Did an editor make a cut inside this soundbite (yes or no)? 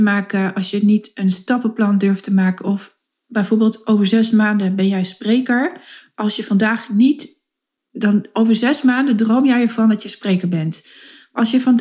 no